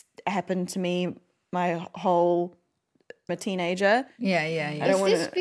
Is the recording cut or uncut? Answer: cut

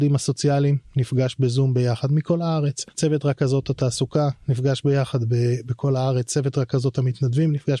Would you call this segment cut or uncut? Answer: cut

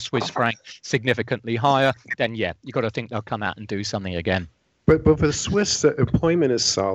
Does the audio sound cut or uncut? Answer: uncut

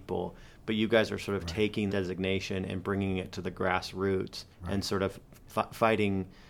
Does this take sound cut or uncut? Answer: cut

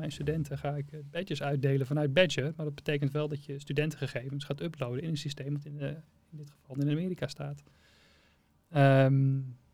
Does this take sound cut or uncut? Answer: uncut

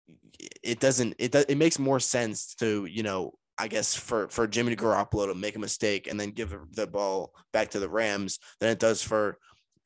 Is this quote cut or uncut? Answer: uncut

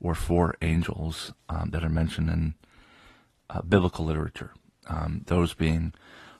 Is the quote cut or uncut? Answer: uncut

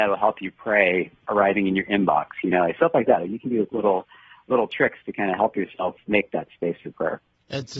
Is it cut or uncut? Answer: uncut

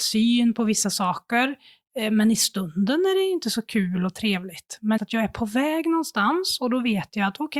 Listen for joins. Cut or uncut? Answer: cut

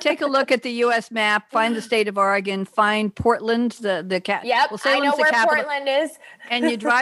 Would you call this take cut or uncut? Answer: uncut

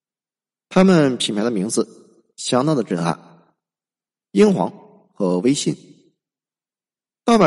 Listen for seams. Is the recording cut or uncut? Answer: uncut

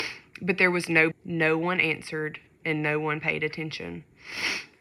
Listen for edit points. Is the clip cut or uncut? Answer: cut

